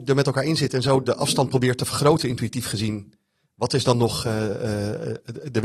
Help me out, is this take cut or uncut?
uncut